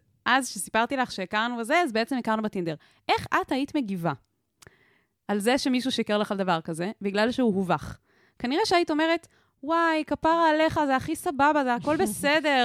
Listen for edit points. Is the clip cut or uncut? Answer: uncut